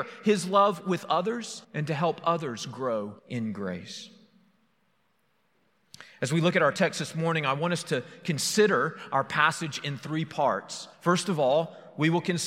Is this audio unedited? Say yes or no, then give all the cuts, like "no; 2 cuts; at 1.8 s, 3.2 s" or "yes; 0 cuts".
no; 3 cuts; at 1.6 s, 3.2 s, 10.9 s